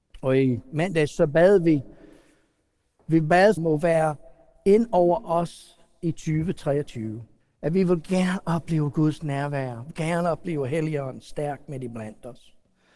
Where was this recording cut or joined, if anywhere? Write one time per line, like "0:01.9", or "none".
0:03.6
0:07.4
0:09.9